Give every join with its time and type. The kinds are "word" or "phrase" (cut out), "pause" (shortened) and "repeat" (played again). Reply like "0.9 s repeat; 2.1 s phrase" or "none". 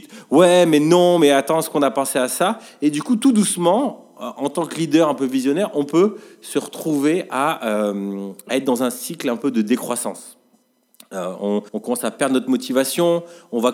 11.7 s pause